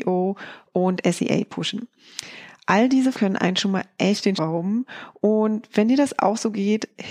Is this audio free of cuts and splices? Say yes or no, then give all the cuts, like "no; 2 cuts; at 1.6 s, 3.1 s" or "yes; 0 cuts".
no; 2 cuts; at 3.1 s, 4.3 s